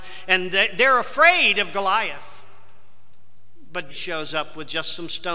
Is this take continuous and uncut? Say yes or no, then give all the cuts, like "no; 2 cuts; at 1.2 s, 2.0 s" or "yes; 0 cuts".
no; 1 cut; at 3.9 s